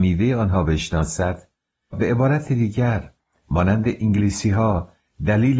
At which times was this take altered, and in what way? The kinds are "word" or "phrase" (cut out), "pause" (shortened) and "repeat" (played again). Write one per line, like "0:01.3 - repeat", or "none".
0:01.9 - word